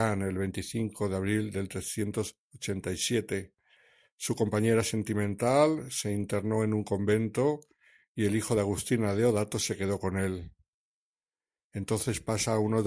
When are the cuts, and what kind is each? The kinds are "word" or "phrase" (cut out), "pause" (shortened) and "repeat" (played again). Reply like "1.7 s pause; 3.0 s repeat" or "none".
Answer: none